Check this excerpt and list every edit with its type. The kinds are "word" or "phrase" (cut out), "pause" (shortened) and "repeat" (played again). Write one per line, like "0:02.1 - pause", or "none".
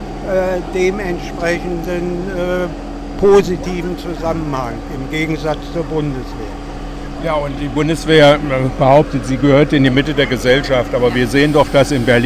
none

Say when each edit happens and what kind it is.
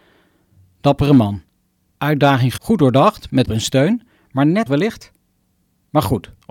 0:02.6 - word
0:03.4 - word
0:04.7 - phrase

